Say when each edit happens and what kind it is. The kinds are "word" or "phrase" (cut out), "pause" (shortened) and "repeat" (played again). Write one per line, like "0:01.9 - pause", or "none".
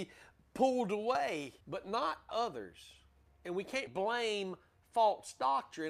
0:01.6 - pause
0:02.3 - word
0:03.9 - word